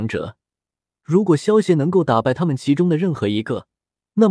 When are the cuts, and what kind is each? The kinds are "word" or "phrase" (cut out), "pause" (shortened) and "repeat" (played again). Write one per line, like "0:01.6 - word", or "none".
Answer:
none

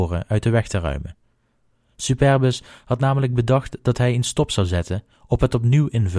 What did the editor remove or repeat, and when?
none

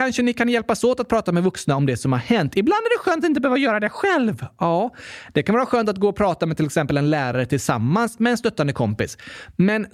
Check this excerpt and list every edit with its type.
none

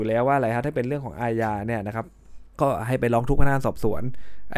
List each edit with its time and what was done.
0:02.5 - pause

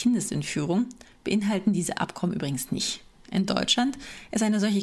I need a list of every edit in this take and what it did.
none

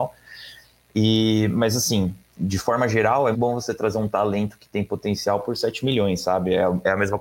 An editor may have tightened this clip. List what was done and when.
0:02.2 - pause
0:03.3 - word

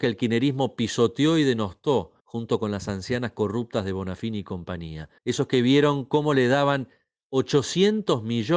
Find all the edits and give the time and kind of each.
0:02.2 - pause
0:05.2 - pause

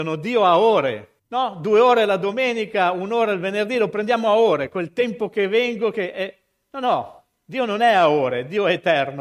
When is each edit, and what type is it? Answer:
0:01.2 - pause

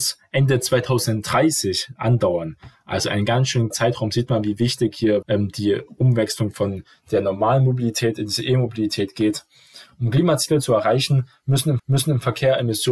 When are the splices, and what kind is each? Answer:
0:03.7 - word
0:05.2 - word
0:11.8 - repeat

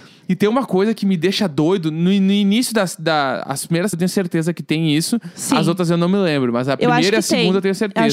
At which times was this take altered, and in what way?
0:03.9 - word

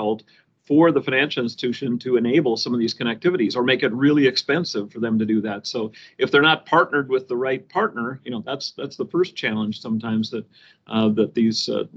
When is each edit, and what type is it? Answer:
none

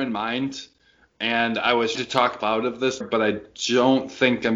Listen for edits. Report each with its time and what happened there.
0:01.9 - word
0:02.4 - word
0:03.0 - word

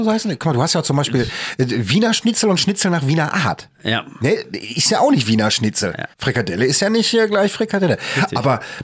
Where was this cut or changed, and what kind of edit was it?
0:06.1 - pause

